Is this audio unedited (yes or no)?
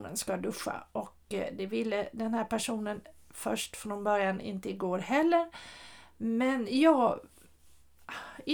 yes